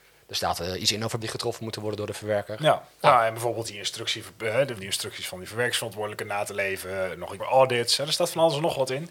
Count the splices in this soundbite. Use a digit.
3